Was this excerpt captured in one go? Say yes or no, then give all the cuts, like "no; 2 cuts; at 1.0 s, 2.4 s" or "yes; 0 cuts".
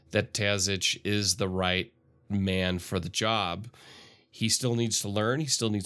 yes; 0 cuts